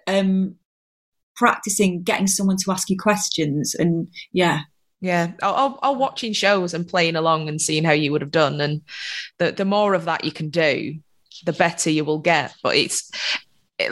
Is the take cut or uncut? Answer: uncut